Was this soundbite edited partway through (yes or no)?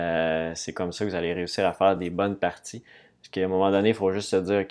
no